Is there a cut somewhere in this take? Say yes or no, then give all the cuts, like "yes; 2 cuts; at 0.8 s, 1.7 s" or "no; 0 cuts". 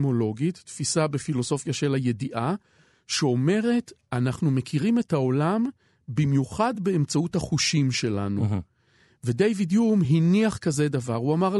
no; 0 cuts